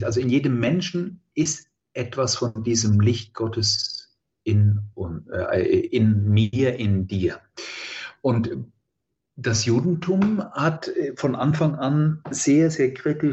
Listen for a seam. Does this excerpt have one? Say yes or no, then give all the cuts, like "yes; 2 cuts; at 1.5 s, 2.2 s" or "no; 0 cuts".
no; 0 cuts